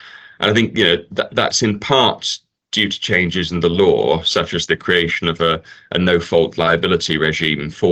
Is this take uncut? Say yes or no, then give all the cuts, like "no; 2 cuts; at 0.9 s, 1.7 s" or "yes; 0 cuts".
yes; 0 cuts